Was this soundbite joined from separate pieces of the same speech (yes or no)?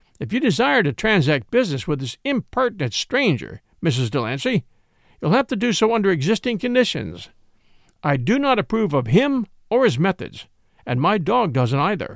no